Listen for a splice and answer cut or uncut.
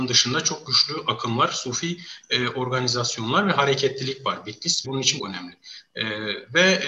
cut